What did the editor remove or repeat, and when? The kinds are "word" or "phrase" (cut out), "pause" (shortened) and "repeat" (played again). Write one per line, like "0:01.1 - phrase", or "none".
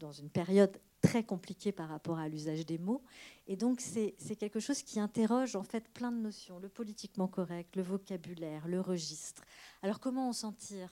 none